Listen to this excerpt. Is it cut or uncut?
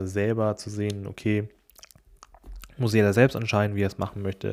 uncut